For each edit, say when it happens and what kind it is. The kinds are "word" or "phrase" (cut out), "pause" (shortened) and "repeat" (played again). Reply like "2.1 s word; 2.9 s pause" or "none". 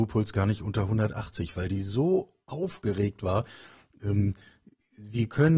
none